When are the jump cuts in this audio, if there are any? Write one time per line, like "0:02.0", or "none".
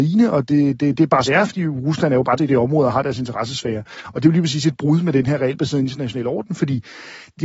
0:01.2
0:02.4